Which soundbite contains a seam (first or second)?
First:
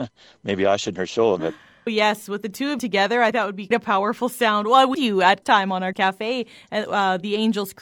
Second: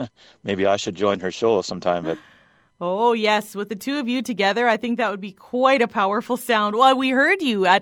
first